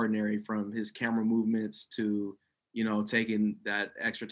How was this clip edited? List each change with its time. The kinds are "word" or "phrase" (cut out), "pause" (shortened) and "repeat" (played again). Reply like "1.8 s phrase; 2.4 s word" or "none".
none